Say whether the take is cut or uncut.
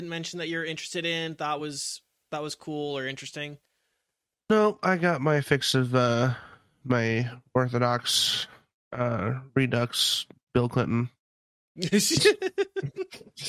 uncut